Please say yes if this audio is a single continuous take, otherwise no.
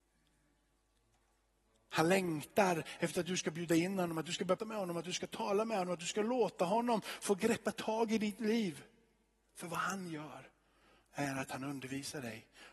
no